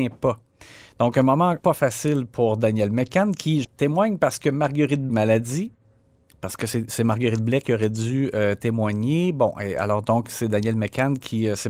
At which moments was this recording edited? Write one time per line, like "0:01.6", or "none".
0:01.6
0:03.6
0:05.1

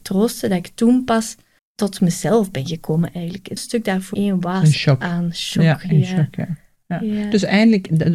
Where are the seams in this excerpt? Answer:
0:01.6
0:03.6
0:04.1

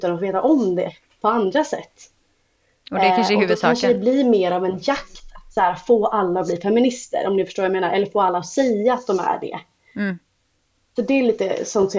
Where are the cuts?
none

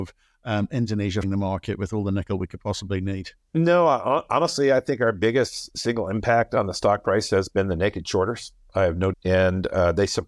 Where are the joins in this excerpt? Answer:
0:01.2
0:09.1

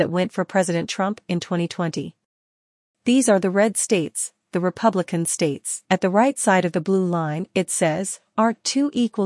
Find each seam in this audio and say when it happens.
0:05.8

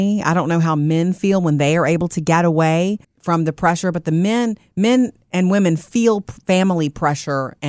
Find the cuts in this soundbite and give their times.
0:03.0

